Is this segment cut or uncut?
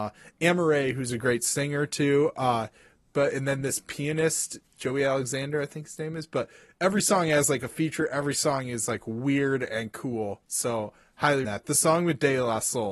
cut